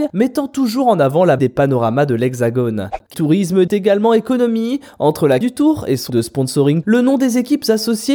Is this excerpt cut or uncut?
cut